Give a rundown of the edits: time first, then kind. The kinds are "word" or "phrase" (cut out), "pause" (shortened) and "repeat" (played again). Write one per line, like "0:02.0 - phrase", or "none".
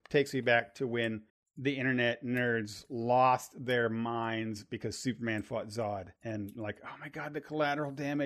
0:01.3 - pause
0:06.2 - pause